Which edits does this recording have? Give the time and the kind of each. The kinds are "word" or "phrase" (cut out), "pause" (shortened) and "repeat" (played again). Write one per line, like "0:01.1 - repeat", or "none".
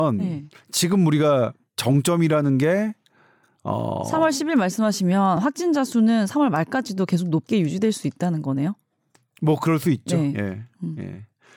none